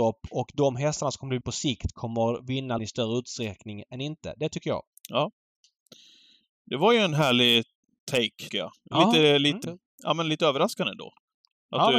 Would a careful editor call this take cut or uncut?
cut